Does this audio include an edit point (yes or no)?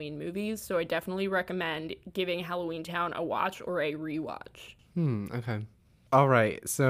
no